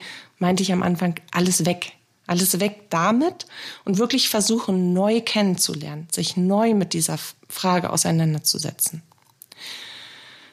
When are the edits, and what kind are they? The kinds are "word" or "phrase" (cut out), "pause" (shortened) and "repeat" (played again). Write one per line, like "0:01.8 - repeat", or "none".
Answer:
none